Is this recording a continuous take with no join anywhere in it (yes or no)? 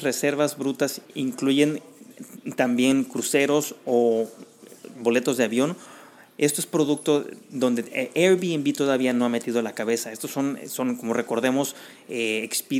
no